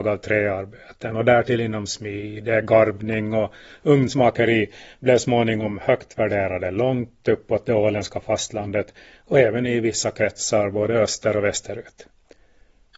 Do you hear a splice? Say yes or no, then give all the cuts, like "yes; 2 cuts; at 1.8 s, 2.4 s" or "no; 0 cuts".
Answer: no; 0 cuts